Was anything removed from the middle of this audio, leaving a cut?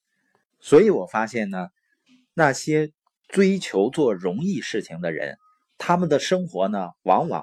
no; 0 cuts

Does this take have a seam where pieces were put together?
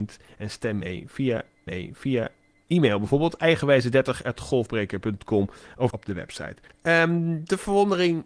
yes; 3 cuts; at 1.7 s, 5.9 s, 6.7 s

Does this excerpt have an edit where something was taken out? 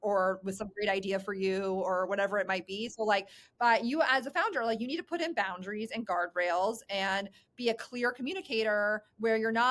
no; 0 cuts

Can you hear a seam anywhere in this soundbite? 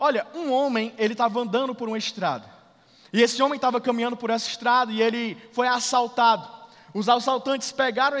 no; 0 cuts

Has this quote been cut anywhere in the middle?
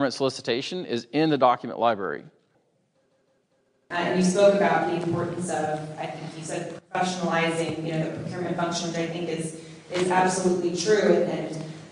no; 0 cuts

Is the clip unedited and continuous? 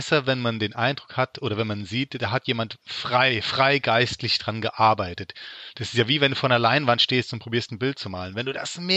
no; 1 cut; at 2.8 s

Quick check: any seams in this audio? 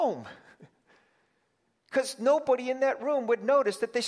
no; 0 cuts

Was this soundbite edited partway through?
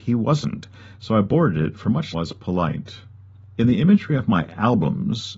yes; 1 cut; at 2.1 s

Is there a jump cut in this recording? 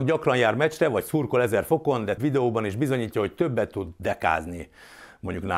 yes; 1 cut; at 2.2 s

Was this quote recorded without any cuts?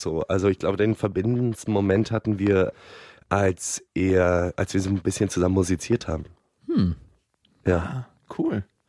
yes; 0 cuts

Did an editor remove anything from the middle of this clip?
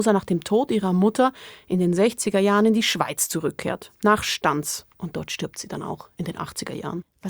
yes; 1 cut; at 4.9 s

